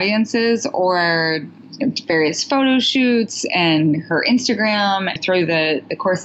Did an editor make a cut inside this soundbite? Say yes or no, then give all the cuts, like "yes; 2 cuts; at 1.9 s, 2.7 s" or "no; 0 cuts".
yes; 1 cut; at 5.2 s